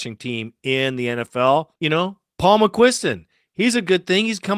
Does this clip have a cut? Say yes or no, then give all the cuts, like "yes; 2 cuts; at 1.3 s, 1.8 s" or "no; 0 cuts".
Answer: yes; 1 cut; at 1.8 s